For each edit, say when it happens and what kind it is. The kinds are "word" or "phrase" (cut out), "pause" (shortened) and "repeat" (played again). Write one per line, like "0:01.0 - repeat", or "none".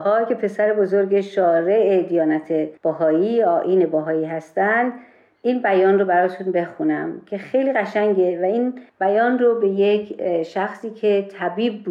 0:02.8 - pause
0:08.9 - pause